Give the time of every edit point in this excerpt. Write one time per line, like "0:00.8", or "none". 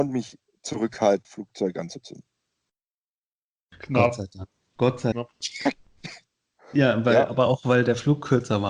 0:01.2
0:05.1